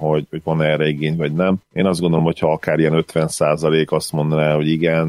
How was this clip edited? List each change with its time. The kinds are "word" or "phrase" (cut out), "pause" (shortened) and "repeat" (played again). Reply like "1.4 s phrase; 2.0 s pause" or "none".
none